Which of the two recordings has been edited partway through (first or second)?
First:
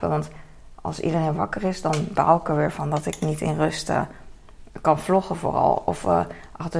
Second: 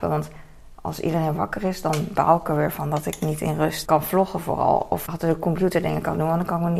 second